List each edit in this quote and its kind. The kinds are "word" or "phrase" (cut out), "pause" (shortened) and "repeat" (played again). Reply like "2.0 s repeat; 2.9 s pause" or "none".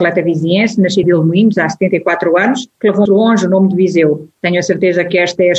1.0 s word; 2.7 s pause; 3.1 s word